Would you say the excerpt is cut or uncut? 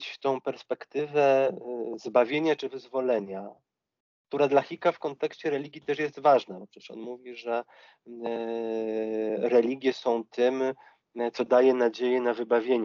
uncut